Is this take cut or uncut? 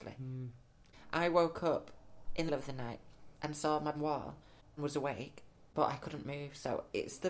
cut